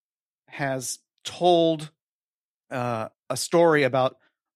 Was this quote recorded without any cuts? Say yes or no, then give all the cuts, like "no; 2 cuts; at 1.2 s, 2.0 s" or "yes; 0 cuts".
no; 1 cut; at 3.2 s